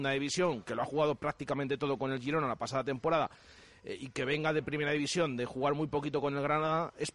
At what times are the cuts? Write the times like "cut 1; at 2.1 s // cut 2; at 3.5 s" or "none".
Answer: none